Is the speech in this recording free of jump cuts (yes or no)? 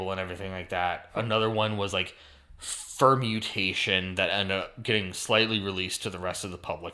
yes